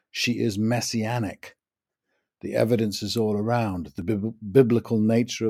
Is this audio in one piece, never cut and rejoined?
yes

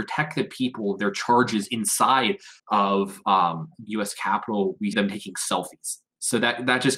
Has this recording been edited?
yes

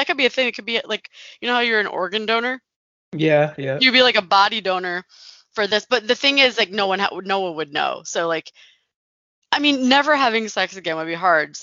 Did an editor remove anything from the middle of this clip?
no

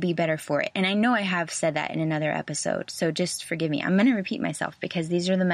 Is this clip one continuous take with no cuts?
yes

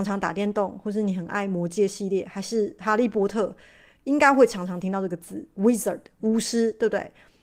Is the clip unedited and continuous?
yes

